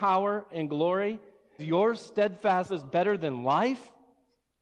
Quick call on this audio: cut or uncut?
cut